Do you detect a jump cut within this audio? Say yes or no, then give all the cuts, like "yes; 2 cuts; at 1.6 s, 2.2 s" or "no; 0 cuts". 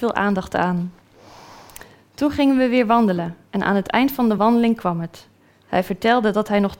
no; 0 cuts